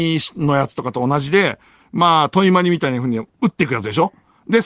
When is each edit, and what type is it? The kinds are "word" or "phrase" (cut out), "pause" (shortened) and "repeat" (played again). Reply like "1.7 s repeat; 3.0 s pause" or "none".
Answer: none